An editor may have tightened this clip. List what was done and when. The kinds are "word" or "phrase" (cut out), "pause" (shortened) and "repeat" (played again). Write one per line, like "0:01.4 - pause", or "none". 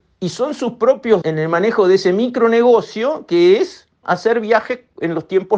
0:01.2 - word
0:04.0 - word